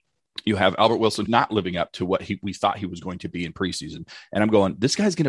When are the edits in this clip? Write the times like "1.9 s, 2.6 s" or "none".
1.3 s